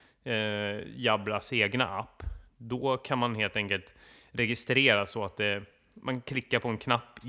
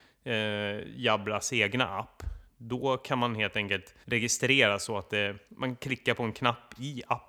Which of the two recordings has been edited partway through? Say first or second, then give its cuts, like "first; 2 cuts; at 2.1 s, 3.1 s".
second; 2 cuts; at 4.0 s, 5.4 s